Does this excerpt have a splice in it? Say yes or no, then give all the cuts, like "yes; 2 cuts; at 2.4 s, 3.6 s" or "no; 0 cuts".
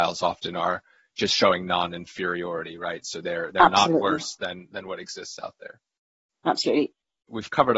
no; 0 cuts